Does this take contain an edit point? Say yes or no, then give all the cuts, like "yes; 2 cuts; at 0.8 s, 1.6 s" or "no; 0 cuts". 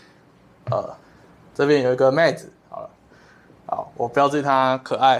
no; 0 cuts